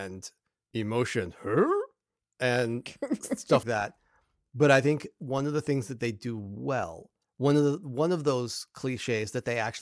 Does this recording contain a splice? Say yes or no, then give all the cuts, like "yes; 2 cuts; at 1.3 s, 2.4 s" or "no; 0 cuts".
yes; 1 cut; at 3.6 s